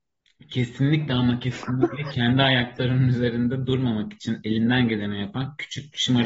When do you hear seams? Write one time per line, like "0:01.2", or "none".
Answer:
none

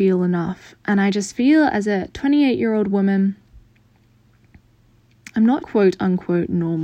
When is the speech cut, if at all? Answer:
0:05.6

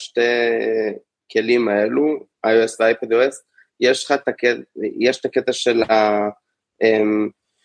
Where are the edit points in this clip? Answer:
none

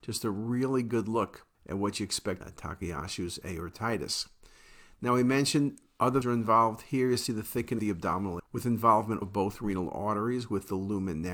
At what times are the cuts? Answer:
0:01.5
0:02.4
0:06.2
0:07.8
0:08.4
0:09.2

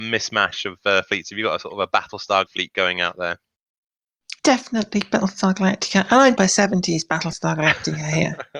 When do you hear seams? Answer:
0:02.5
0:04.4
0:06.4

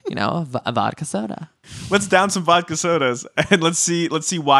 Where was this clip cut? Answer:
none

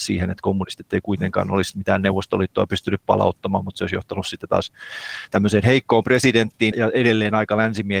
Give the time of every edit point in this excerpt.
0:06.7

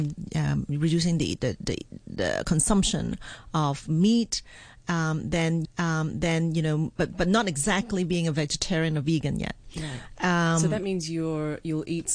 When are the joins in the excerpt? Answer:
0:05.6

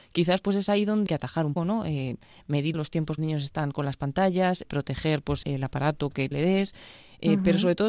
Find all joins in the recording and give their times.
0:01.1
0:01.6
0:02.7
0:03.2
0:04.6
0:05.4
0:06.3

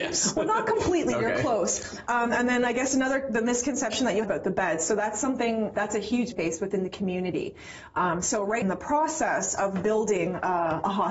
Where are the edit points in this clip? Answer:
0:04.2
0:05.7
0:06.3
0:08.6

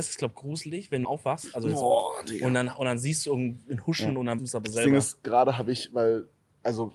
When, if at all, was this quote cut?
0:01.0
0:04.4

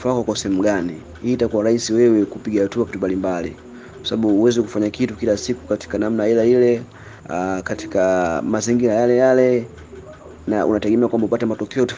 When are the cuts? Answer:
0:02.9
0:07.2

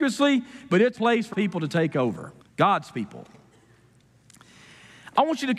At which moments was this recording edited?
0:00.9
0:01.3
0:02.4

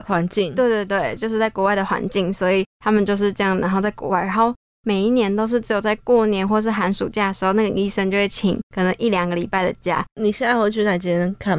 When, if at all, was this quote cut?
0:10.1

